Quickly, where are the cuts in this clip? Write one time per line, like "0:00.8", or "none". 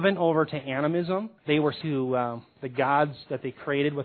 0:01.4
0:01.8